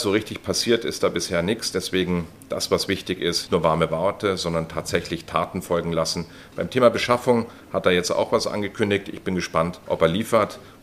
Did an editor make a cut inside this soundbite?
yes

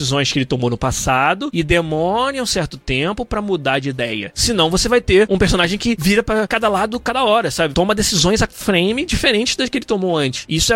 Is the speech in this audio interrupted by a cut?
yes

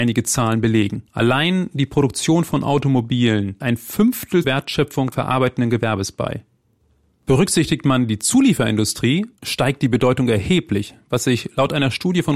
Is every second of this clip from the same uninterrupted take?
no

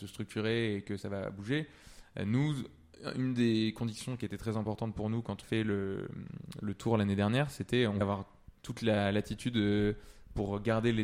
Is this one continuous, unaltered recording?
no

